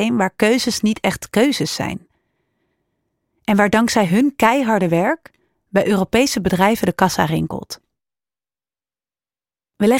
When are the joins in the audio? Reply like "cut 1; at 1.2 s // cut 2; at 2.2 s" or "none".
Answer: none